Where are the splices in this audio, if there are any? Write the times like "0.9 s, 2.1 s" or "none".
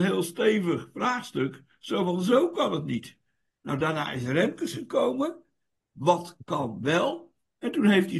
none